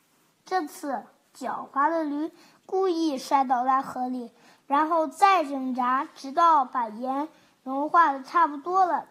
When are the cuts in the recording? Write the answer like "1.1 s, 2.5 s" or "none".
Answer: none